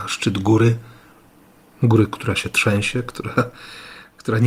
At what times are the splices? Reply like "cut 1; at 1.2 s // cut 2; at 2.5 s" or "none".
none